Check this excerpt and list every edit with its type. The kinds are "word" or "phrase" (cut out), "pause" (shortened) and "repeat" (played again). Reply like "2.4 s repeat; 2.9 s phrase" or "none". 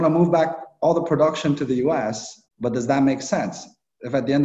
2.5 s pause